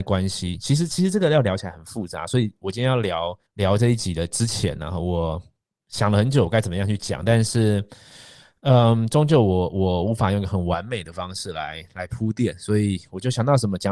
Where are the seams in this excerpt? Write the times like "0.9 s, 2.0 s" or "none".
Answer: 3.5 s